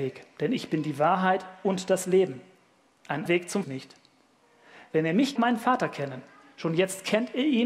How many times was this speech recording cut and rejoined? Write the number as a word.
three